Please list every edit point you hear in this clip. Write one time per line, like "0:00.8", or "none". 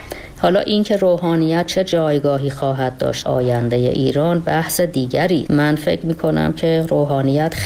0:03.3
0:05.5